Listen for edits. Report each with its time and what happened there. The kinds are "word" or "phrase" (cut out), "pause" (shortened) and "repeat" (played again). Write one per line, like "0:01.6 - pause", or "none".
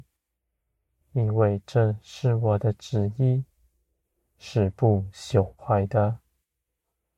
0:05.6 - pause